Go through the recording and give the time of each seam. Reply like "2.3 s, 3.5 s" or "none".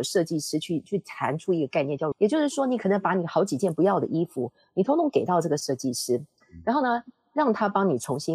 2.1 s